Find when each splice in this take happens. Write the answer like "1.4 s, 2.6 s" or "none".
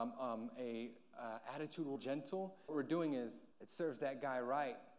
2.0 s, 2.7 s, 3.5 s